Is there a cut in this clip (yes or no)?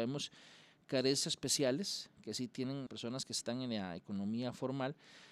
yes